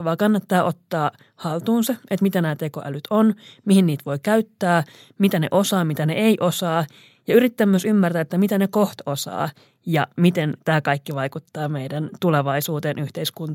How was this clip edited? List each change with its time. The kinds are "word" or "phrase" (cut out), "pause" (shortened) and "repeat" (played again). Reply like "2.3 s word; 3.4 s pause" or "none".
none